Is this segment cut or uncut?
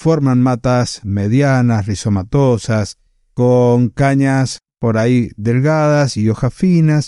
uncut